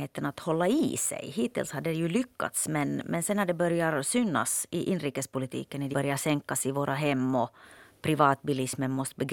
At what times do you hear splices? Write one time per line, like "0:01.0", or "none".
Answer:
0:05.9

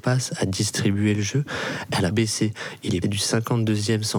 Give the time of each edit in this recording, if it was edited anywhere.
0:02.1
0:03.0

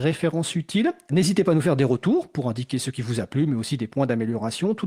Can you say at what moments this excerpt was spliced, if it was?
none

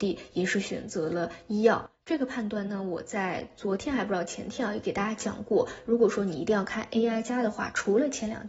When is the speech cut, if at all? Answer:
none

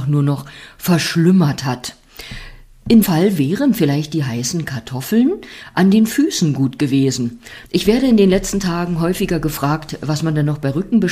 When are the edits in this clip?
0:03.0
0:07.7

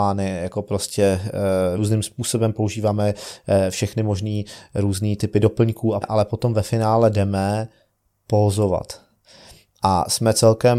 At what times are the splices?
0:01.8
0:06.0

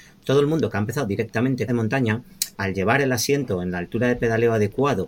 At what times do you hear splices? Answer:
0:01.7

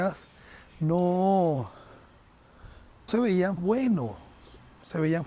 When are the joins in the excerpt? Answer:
0:03.1
0:03.6

